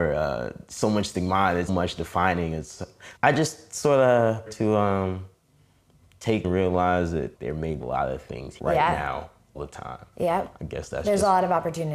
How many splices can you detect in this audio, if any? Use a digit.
8